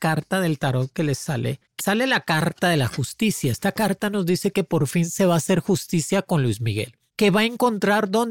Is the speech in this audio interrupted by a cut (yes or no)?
yes